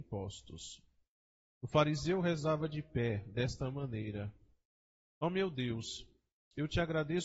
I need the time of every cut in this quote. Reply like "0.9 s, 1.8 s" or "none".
none